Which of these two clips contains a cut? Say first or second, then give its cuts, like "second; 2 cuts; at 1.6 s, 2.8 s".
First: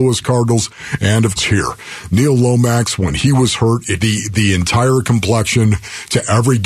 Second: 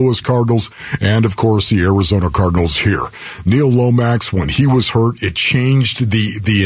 first; 2 cuts; at 1.4 s, 4.0 s